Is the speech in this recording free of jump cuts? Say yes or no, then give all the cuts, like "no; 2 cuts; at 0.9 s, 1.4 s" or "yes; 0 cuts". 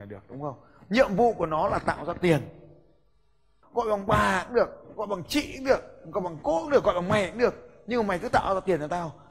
yes; 0 cuts